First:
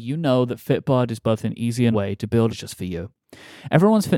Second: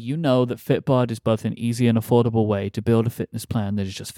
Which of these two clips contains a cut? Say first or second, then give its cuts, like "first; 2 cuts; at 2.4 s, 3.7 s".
first; 2 cuts; at 1.9 s, 2.5 s